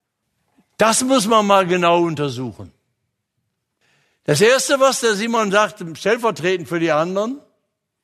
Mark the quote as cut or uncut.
uncut